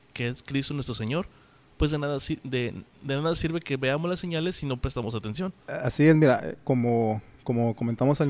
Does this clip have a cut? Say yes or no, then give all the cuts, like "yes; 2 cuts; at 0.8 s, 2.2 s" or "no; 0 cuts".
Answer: yes; 2 cuts; at 2.9 s, 5.6 s